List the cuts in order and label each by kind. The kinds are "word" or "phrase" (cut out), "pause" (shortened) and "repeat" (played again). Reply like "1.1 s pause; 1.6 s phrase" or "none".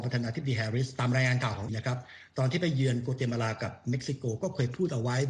1.7 s word